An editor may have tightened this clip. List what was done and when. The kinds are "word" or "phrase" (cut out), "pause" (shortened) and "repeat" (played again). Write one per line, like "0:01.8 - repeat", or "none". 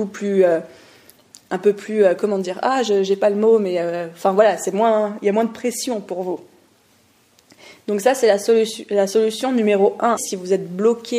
0:10.2 - word